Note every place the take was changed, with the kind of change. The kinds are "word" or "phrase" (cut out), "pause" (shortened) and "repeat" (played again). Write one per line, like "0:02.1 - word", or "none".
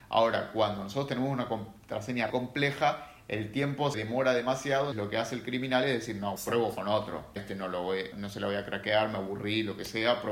0:02.3 - word
0:03.9 - word
0:04.9 - word
0:06.4 - word
0:07.4 - word
0:08.1 - word